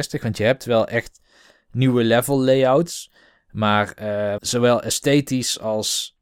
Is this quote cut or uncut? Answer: cut